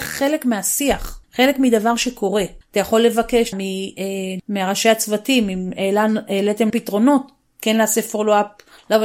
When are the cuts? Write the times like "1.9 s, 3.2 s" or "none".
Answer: 3.5 s, 4.4 s, 6.7 s